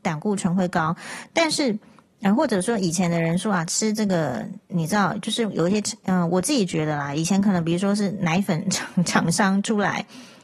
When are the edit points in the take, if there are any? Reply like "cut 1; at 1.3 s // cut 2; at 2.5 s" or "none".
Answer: cut 1; at 4.6 s